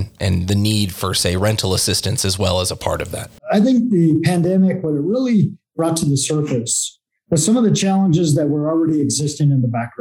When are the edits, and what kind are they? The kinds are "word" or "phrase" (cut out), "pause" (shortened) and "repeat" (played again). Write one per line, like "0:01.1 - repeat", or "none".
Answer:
0:03.4 - pause